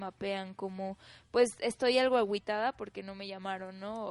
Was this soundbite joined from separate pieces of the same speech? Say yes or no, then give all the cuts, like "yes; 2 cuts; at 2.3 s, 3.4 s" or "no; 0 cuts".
no; 0 cuts